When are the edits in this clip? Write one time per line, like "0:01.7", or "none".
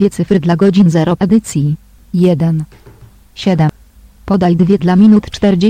0:01.2
0:04.8